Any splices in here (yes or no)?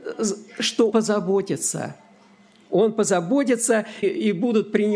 yes